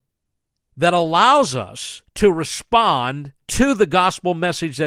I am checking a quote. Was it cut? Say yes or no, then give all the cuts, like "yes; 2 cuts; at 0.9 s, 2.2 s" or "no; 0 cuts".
yes; 2 cuts; at 2.1 s, 3.4 s